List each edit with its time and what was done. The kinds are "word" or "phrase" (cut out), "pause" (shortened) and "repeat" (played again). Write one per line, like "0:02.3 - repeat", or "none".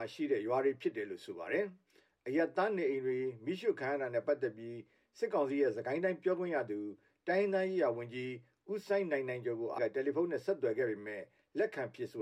0:09.8 - word